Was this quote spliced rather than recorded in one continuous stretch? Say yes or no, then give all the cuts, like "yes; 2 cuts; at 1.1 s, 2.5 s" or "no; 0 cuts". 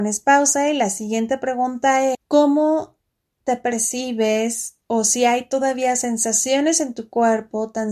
yes; 2 cuts; at 2.1 s, 4.8 s